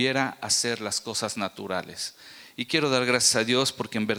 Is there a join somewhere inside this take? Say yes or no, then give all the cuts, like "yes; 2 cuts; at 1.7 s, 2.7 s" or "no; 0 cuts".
no; 0 cuts